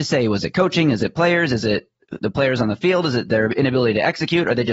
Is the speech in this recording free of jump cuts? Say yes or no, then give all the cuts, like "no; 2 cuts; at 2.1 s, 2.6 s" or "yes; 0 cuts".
yes; 0 cuts